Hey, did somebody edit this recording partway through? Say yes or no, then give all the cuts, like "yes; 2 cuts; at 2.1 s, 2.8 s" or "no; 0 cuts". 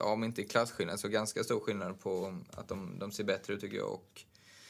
no; 0 cuts